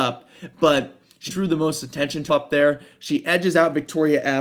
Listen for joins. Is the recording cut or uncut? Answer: cut